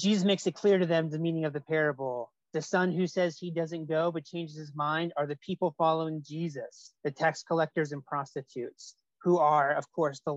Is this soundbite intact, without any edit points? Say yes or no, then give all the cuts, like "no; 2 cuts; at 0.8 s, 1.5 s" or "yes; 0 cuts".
no; 2 cuts; at 2.4 s, 7.0 s